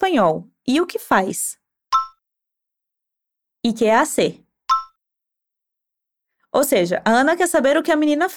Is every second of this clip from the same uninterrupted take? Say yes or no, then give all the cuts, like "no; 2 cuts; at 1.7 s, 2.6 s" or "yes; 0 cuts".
yes; 0 cuts